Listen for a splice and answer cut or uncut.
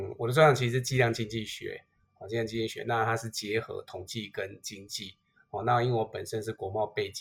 uncut